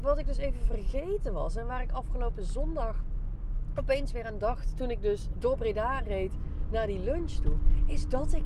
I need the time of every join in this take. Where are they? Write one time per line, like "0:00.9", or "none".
0:05.3